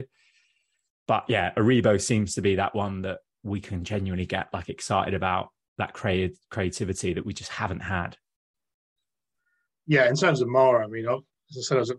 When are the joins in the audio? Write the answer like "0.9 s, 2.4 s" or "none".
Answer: none